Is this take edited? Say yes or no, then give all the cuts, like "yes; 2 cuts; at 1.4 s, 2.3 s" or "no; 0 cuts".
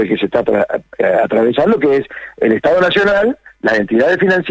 no; 0 cuts